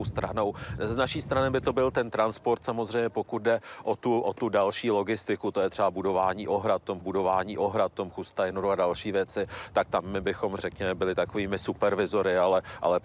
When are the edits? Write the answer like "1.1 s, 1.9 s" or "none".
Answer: 7.0 s, 10.6 s